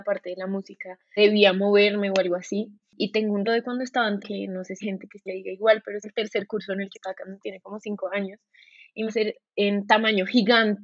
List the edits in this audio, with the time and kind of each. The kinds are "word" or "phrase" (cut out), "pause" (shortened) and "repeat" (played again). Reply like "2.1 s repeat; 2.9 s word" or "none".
1.2 s word; 3.4 s word; 4.2 s word; 4.8 s word; 5.3 s word; 6.0 s word; 6.9 s word; 7.4 s word; 9.1 s word